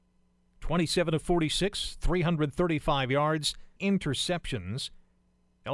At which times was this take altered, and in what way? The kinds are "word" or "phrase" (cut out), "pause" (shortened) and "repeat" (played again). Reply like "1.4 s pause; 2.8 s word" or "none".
3.8 s word